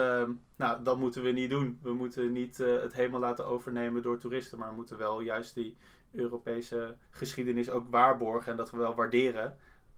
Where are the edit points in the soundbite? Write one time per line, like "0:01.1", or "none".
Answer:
0:07.0